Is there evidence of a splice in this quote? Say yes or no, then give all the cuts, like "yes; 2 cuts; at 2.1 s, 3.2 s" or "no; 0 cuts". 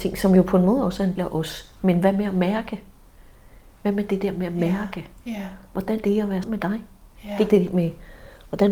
yes; 4 cuts; at 1.2 s, 6.0 s, 6.4 s, 7.5 s